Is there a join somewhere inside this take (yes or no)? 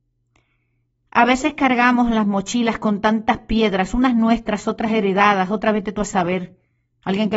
no